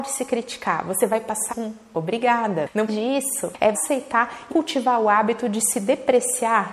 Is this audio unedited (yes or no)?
no